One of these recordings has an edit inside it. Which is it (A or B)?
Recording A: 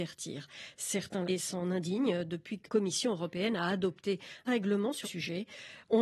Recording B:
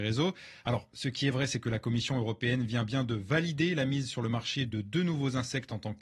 A